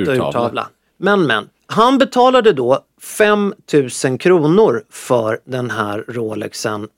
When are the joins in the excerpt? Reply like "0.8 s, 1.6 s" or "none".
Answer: none